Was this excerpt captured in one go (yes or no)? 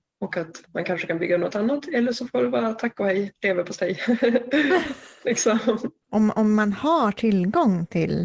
yes